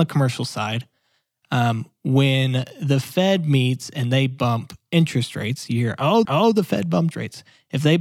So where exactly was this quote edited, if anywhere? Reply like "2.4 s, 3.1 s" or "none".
6.2 s, 7.1 s